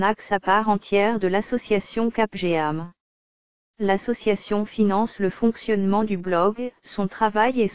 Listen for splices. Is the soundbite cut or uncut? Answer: uncut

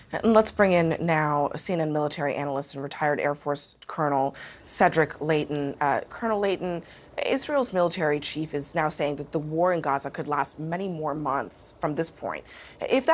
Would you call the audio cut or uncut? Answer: uncut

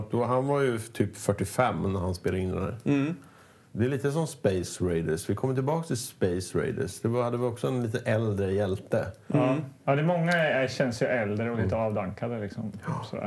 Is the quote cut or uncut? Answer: uncut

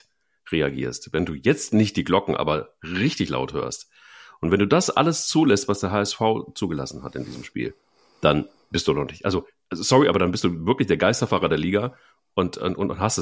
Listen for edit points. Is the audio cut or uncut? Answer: uncut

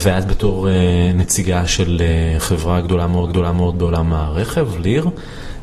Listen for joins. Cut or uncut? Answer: cut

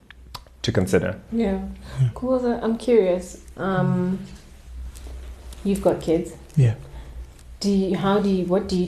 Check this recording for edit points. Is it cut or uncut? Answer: uncut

